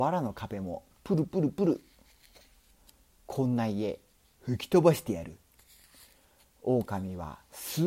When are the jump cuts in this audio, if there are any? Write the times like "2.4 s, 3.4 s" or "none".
none